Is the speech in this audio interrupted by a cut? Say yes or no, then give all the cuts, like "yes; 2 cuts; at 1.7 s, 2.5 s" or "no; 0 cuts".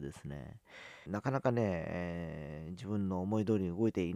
yes; 1 cut; at 1.1 s